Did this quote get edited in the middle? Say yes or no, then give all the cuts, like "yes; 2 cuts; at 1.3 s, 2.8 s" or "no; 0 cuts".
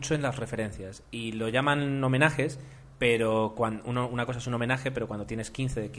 no; 0 cuts